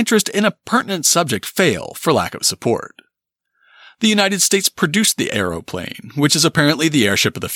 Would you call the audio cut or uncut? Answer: uncut